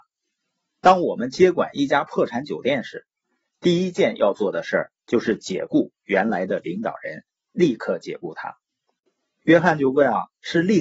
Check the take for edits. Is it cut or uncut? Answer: uncut